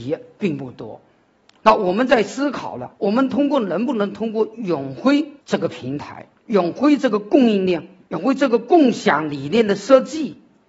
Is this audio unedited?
no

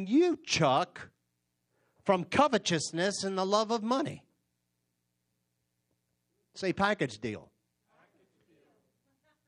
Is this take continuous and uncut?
yes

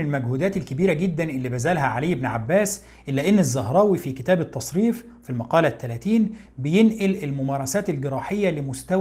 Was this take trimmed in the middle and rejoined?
no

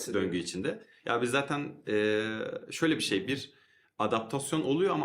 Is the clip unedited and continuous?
yes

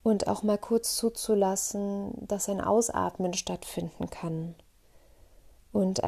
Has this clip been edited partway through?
no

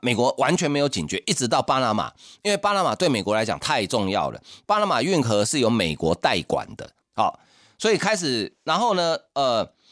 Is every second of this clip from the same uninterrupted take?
yes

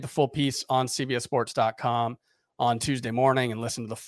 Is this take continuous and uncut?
yes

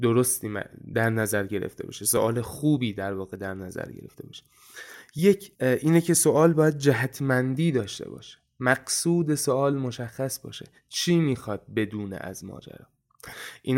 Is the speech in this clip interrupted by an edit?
yes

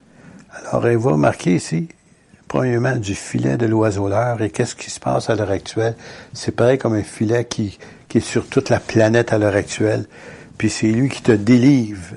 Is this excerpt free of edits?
yes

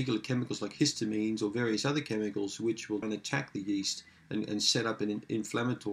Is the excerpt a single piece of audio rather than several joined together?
no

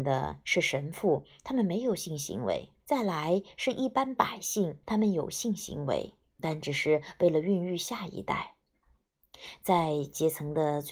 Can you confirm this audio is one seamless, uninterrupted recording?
no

